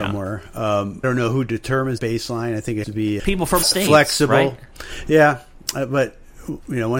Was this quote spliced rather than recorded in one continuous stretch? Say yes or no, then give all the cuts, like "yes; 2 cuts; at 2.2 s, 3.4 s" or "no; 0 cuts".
yes; 5 cuts; at 1.0 s, 2.0 s, 2.8 s, 3.2 s, 3.6 s